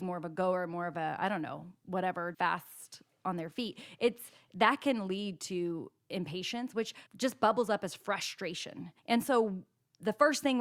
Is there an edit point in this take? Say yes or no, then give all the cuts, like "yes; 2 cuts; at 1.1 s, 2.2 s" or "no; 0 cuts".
yes; 3 cuts; at 2.3 s, 7.1 s, 9.0 s